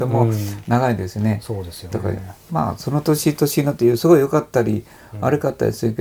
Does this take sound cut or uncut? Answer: cut